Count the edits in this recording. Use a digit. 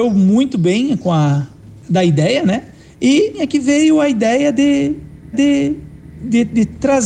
2